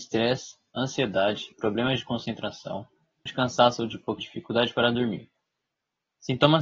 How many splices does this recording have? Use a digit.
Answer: 3